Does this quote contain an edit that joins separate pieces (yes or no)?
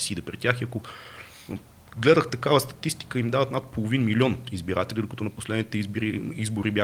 no